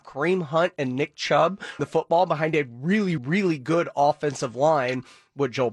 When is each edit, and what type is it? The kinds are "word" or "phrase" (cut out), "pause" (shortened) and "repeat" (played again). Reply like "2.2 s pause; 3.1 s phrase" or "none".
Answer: 1.8 s word; 3.2 s word